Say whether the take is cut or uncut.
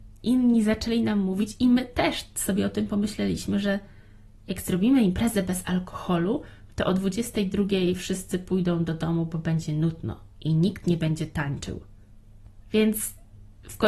uncut